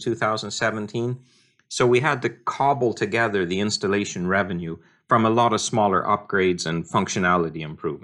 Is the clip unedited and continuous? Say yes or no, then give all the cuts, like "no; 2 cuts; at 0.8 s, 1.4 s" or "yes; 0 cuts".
yes; 0 cuts